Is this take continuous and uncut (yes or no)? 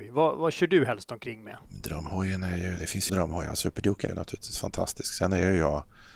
no